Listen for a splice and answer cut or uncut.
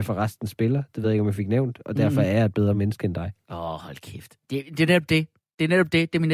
uncut